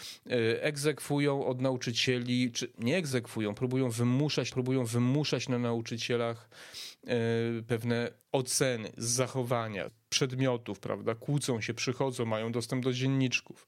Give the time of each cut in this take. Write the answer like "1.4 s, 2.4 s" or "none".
4.5 s, 8.2 s, 9.9 s